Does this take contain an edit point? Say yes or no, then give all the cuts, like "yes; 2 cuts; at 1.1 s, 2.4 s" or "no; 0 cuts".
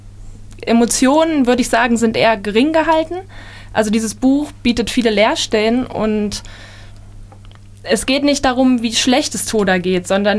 no; 0 cuts